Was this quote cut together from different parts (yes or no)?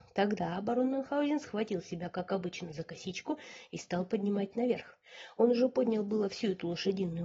no